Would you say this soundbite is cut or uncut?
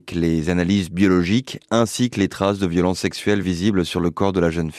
uncut